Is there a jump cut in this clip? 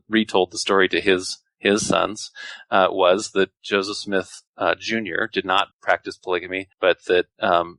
yes; 3 cuts; at 4.5 s, 5.7 s, 6.7 s

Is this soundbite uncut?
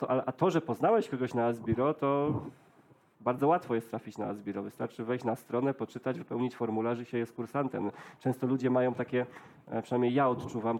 yes; 0 cuts

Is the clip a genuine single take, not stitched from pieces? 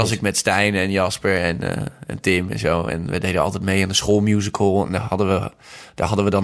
yes; 0 cuts

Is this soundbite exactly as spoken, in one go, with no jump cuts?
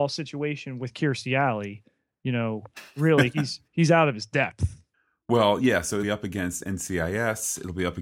no; 3 cuts; at 3.7 s, 4.9 s, 6.0 s

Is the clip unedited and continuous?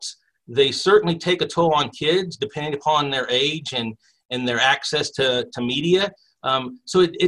yes; 0 cuts

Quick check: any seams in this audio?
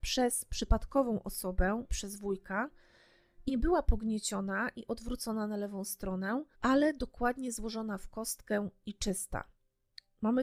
yes; 3 cuts; at 1.9 s, 3.5 s, 6.5 s

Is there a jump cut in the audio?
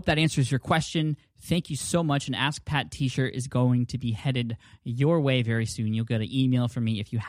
no; 0 cuts

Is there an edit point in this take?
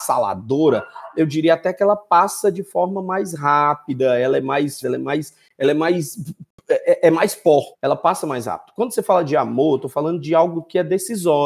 yes; 2 cuts; at 4.8 s, 7.7 s

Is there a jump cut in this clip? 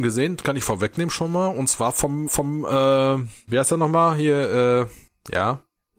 yes; 1 cut; at 2.3 s

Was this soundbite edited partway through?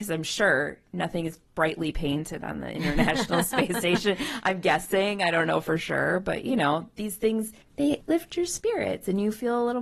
no; 0 cuts

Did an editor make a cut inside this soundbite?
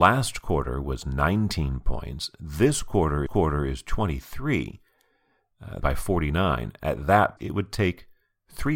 yes; 3 cuts; at 3.3 s, 5.8 s, 7.4 s

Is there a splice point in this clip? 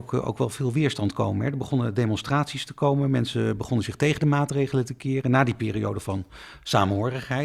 no; 0 cuts

